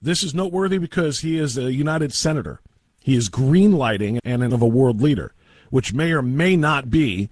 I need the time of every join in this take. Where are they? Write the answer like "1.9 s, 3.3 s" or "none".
2.1 s, 4.2 s, 4.5 s